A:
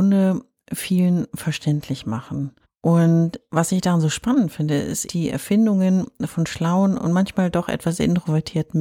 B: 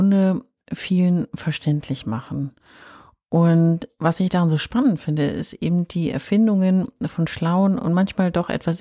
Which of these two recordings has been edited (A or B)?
A